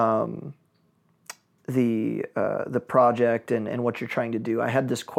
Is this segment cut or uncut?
uncut